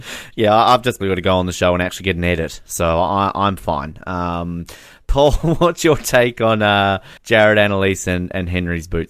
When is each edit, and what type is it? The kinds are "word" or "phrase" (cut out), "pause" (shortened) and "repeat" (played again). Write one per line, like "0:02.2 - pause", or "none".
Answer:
0:01.0 - word
0:07.2 - pause